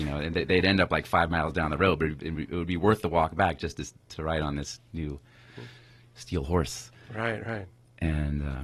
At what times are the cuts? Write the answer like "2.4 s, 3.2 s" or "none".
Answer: none